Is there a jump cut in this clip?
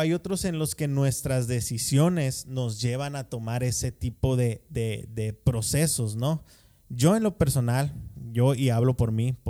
no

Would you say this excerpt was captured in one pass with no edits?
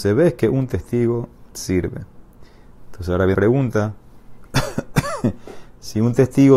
no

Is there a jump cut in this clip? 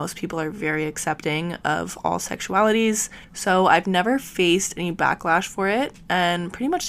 yes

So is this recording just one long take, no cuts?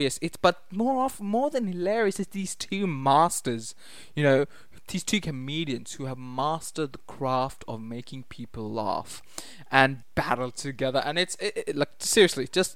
no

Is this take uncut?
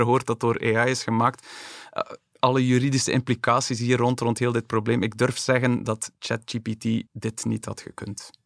no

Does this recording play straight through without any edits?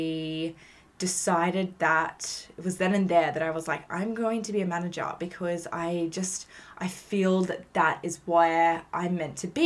yes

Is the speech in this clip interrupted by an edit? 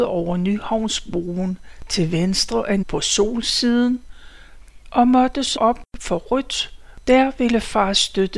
yes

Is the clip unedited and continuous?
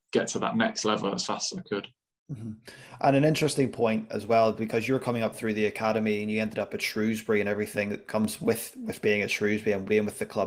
yes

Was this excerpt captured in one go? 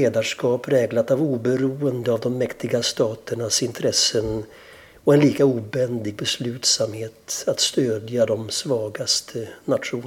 yes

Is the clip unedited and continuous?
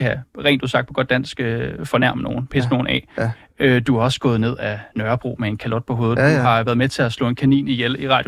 yes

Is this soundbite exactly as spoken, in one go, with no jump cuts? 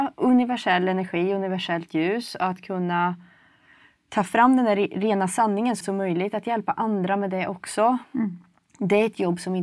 no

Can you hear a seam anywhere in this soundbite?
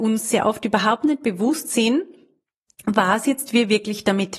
no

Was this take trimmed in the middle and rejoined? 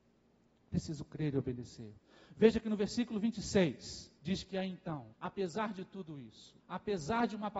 yes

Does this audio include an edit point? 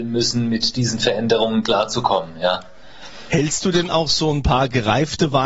no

